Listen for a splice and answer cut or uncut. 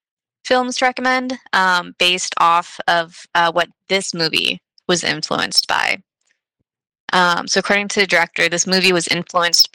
uncut